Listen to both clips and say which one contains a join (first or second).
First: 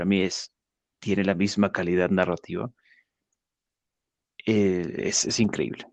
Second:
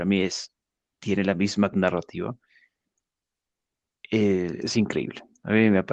second